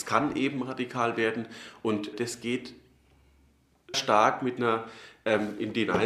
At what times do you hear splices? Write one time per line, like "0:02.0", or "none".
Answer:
0:02.1
0:03.9